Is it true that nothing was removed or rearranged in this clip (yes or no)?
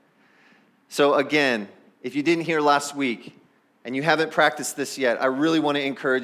yes